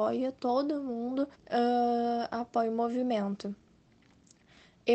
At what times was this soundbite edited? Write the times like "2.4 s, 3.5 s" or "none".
1.3 s